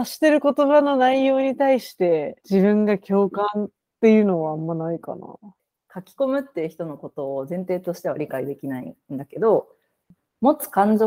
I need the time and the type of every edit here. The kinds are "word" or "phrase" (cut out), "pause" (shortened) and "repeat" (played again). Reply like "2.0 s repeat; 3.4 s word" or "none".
2.4 s pause